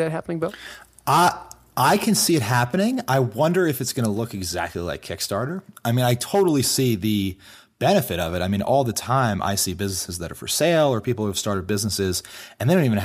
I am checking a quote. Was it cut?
no; 0 cuts

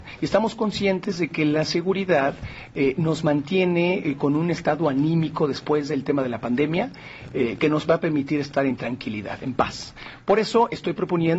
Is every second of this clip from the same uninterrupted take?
yes; 0 cuts

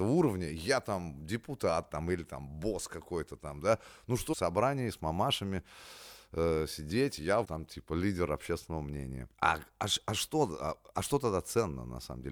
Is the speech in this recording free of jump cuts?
no; 3 cuts; at 4.3 s, 7.4 s, 9.3 s

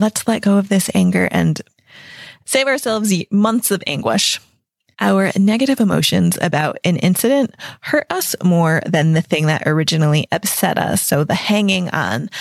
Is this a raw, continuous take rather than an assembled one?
yes; 0 cuts

